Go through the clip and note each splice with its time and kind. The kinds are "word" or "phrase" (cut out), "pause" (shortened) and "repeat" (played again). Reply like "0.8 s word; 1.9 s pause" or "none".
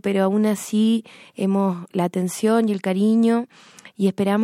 1.9 s word